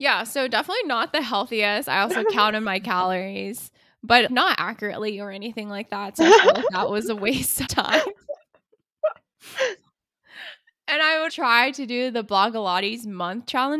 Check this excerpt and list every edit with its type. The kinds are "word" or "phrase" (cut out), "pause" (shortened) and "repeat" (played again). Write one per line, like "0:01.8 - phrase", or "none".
0:07.7 - word
0:11.3 - word